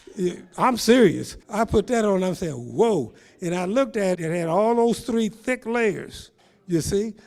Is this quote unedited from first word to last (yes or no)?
no